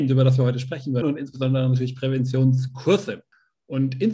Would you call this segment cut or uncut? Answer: cut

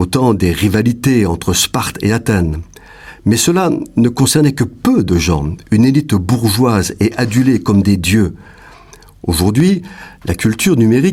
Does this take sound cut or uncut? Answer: uncut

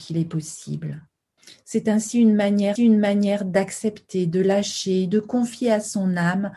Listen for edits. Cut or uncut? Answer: cut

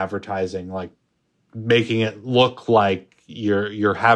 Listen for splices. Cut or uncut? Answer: uncut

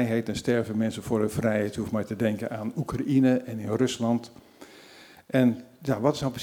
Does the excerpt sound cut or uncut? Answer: uncut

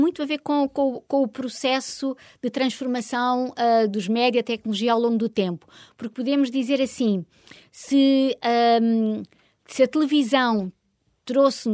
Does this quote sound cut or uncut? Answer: cut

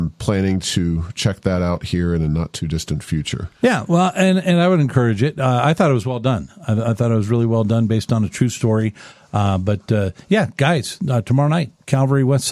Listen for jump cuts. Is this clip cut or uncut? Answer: cut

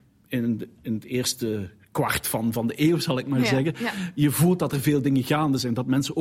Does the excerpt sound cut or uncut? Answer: uncut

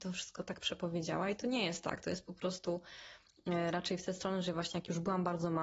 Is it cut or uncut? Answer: uncut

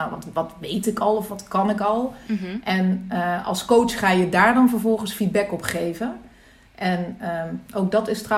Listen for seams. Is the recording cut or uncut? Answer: uncut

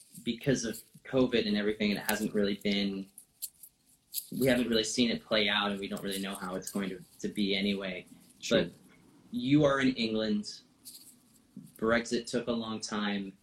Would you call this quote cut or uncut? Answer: uncut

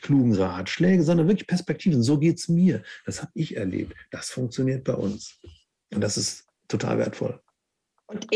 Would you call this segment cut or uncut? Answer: uncut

